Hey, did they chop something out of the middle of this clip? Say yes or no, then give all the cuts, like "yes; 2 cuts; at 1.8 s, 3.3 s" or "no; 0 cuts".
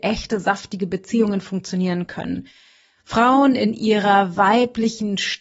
no; 0 cuts